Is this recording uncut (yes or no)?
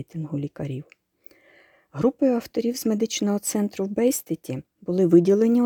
yes